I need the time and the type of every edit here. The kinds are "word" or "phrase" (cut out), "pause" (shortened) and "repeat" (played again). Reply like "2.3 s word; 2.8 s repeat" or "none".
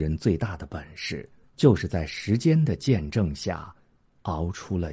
1.4 s pause